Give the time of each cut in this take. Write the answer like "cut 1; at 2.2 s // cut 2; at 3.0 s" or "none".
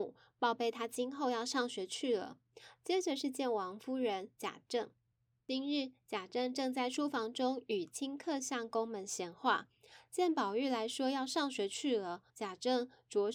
cut 1; at 5.0 s // cut 2; at 12.3 s